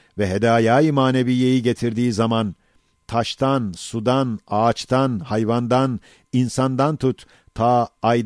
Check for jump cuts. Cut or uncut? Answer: uncut